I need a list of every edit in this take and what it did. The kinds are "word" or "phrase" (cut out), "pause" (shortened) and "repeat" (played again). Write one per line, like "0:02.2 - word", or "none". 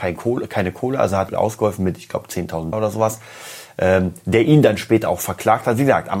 0:01.3 - phrase
0:02.7 - word